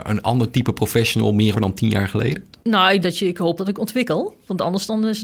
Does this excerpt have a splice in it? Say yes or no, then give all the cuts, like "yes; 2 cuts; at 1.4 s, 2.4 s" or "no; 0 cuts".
yes; 3 cuts; at 1.5 s, 3.0 s, 3.6 s